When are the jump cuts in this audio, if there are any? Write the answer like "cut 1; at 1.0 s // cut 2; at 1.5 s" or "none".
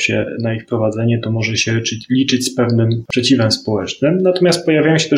none

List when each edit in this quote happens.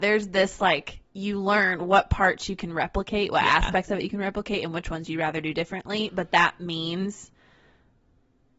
cut 1; at 1.0 s

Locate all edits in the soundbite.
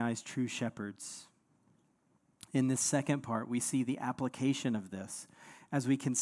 none

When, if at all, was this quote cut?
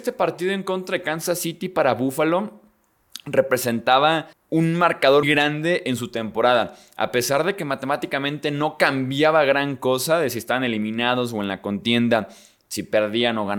cut 1; at 4.3 s // cut 2; at 5.2 s

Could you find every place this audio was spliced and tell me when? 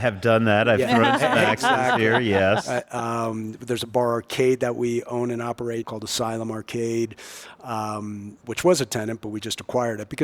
cut 1; at 5.8 s

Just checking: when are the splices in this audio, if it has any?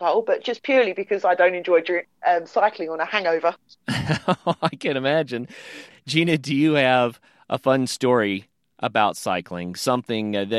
none

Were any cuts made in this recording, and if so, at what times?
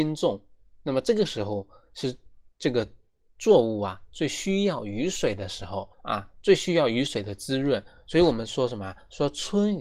cut 1; at 5.9 s

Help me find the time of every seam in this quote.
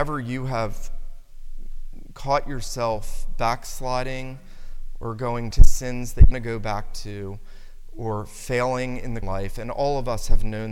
cut 1; at 5.5 s // cut 2; at 6.3 s // cut 3; at 9.2 s

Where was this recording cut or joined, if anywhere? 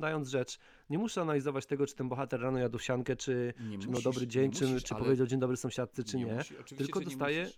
none

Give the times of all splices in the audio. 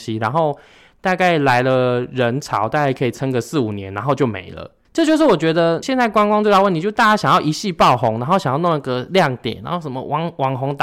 cut 1; at 4.8 s // cut 2; at 5.8 s

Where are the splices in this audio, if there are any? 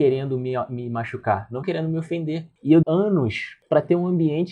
cut 1; at 1.6 s // cut 2; at 2.8 s

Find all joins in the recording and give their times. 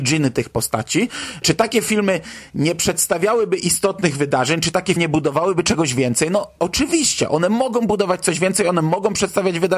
cut 1; at 5.0 s

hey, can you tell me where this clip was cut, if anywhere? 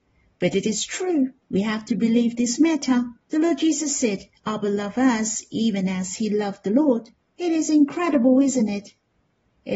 cut 1; at 1.4 s // cut 2; at 3.2 s // cut 3; at 4.4 s // cut 4; at 7.2 s

